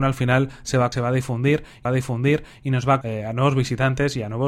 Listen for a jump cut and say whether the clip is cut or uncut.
cut